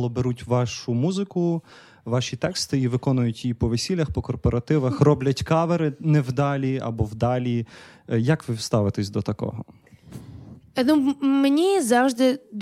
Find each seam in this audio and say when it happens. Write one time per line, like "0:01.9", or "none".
none